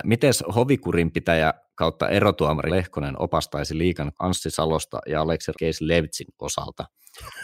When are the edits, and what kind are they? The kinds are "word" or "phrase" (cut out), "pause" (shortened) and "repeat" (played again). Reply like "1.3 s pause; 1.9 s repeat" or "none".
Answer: 2.7 s word; 4.1 s word; 5.5 s word